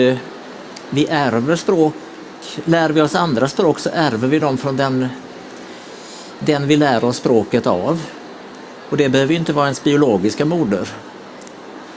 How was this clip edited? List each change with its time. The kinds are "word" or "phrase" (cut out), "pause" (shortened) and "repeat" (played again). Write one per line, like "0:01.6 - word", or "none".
none